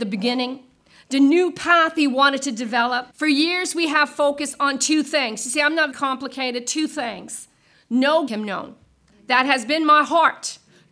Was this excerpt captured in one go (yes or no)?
no